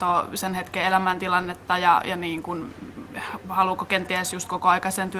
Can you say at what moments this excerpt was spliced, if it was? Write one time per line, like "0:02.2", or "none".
none